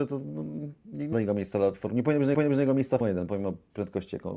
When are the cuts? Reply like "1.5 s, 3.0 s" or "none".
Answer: 1.1 s, 2.3 s, 3.0 s